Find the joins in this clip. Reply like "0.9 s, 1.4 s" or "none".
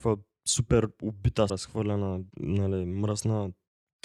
1.5 s, 2.3 s